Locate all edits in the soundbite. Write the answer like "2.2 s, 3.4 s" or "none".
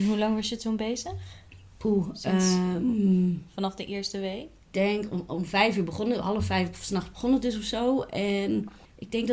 none